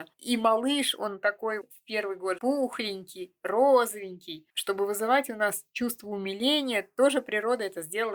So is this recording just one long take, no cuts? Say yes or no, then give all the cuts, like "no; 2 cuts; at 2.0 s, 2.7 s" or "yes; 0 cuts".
no; 2 cuts; at 1.6 s, 2.4 s